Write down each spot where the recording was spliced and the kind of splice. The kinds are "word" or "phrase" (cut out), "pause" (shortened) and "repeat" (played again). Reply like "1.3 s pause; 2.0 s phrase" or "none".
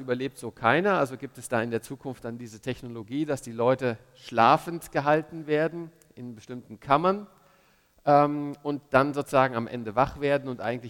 none